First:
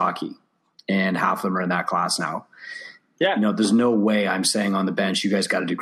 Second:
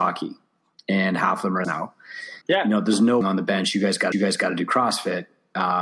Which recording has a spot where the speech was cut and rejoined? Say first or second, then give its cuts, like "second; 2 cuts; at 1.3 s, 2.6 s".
second; 4 cuts; at 1.6 s, 2.4 s, 3.2 s, 4.1 s